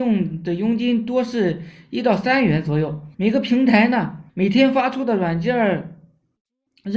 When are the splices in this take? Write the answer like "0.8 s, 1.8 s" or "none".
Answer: 3.1 s, 4.3 s

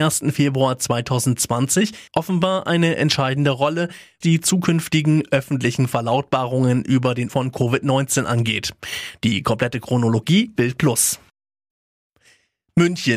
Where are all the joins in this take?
2.1 s, 4.2 s, 7.3 s, 10.6 s

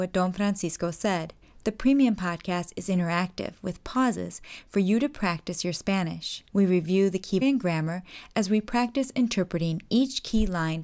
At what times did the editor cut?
1.4 s, 6.5 s, 7.4 s

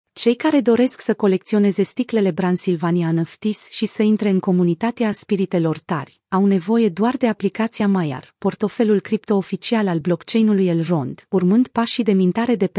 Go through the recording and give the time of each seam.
none

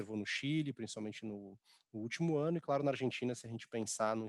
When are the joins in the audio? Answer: none

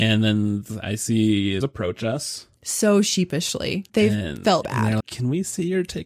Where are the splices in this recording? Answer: 1.6 s, 2.6 s, 3.9 s, 4.6 s, 5.0 s

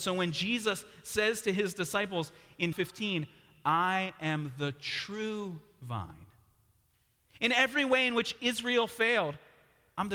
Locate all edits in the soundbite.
2.7 s

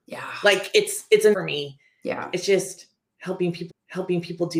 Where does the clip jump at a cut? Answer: 1.3 s, 3.7 s

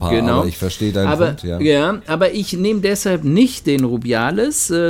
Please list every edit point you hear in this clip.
none

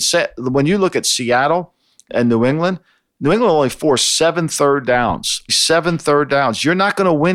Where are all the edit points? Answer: 2.1 s, 5.5 s

